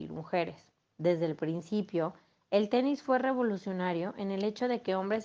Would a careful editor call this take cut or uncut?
uncut